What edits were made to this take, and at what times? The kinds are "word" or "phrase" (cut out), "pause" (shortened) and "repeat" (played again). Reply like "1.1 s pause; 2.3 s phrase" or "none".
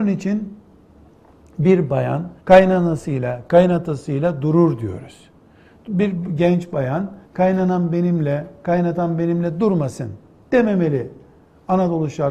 2.4 s pause; 7.2 s pause